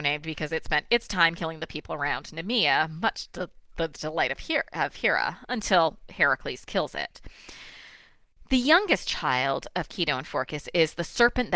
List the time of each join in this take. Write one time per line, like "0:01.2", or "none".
none